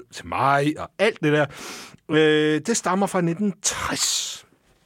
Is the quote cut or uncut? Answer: uncut